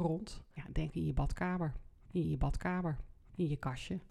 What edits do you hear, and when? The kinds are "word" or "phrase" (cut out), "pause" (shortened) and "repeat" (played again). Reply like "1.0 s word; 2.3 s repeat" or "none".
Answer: 0.9 s phrase; 2.2 s repeat